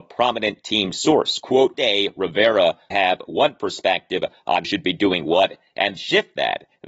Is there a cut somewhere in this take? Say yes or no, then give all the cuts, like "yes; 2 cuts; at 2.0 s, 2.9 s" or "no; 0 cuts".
yes; 4 cuts; at 1.7 s, 2.9 s, 4.6 s, 6.0 s